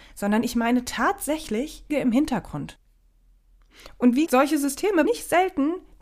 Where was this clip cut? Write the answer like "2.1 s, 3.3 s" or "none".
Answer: 1.9 s, 4.3 s, 5.1 s

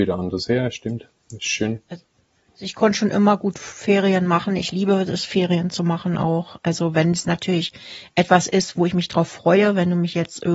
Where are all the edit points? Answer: none

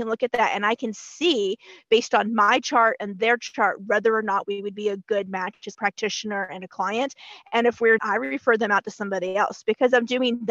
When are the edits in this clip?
5.7 s, 8.0 s

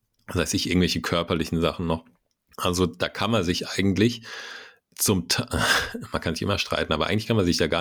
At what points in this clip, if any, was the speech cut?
4.8 s

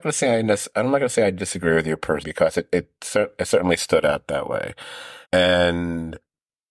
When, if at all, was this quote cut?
2.2 s, 5.2 s

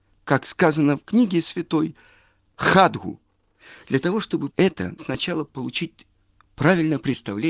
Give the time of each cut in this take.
4.5 s, 5.0 s

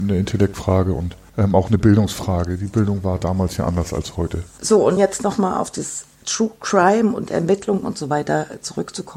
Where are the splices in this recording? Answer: 1.3 s, 5.0 s, 6.1 s

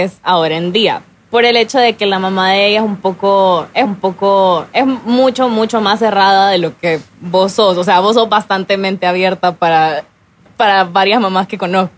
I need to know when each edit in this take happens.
3.8 s

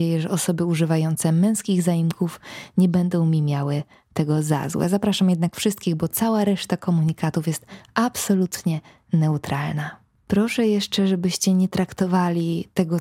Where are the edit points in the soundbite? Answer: none

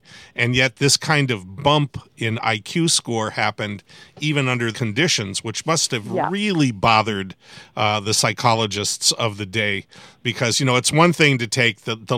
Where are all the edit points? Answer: 4.7 s

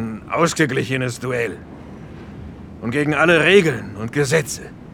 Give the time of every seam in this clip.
none

